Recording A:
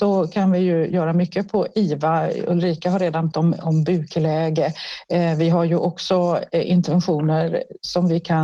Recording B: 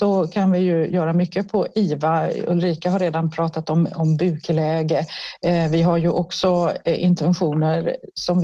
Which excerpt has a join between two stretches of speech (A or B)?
A